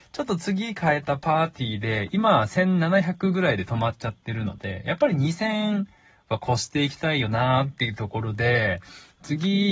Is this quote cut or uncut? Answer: uncut